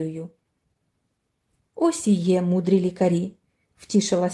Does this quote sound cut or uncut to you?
uncut